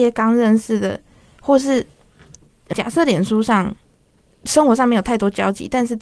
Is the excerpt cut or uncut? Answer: cut